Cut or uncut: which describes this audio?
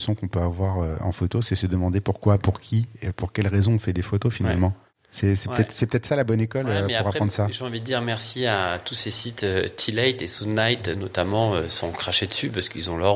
uncut